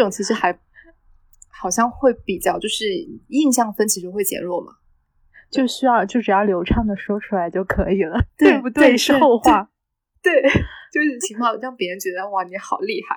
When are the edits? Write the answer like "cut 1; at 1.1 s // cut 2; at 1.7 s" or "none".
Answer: none

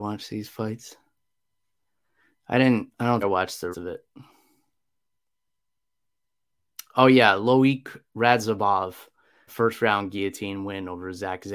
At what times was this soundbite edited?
cut 1; at 3.2 s // cut 2; at 3.7 s // cut 3; at 9.5 s

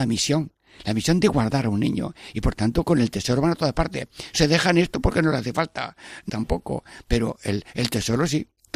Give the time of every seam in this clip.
cut 1; at 6.3 s

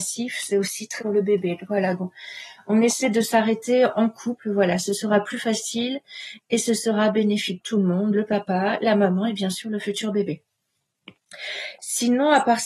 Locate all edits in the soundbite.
cut 1; at 1.0 s // cut 2; at 2.0 s // cut 3; at 7.6 s

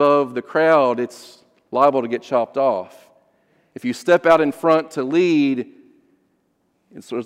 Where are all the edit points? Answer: none

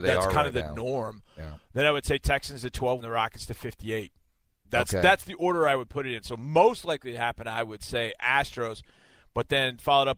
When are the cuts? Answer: cut 1; at 3.0 s

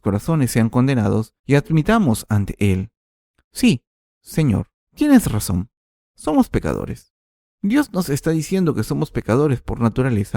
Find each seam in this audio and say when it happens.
cut 1; at 1.4 s // cut 2; at 4.8 s

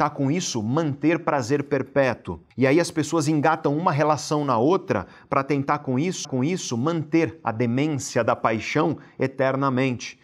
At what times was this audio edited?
cut 1; at 6.2 s

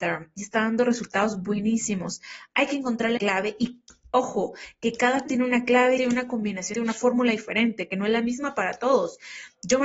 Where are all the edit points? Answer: cut 1; at 3.2 s // cut 2; at 5.3 s // cut 3; at 6.0 s // cut 4; at 6.7 s

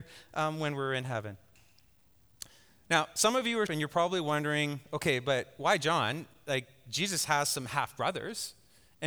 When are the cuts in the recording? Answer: cut 1; at 3.7 s

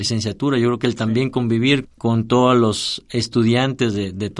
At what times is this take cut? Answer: cut 1; at 1.8 s

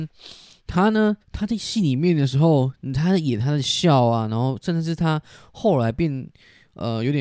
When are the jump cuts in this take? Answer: cut 1; at 1.2 s

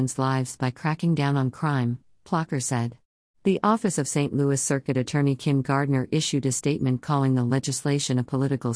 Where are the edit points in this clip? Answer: cut 1; at 3.2 s

